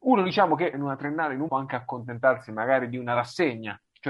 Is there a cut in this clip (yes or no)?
yes